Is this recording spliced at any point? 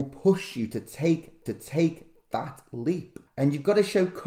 yes; 2 cuts; at 1.5 s, 3.3 s

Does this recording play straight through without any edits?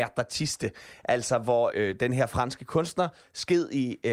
no; 1 cut; at 1.7 s

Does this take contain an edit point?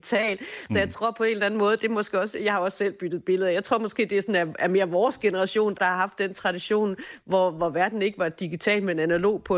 yes; 1 cut; at 5.7 s

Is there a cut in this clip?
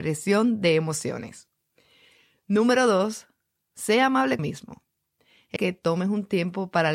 yes; 2 cuts; at 4.4 s, 5.6 s

